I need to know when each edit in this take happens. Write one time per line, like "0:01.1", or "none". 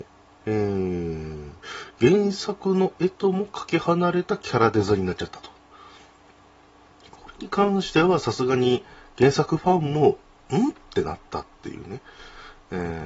none